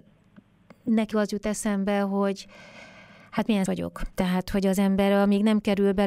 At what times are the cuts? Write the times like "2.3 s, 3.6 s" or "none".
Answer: 1.1 s, 3.7 s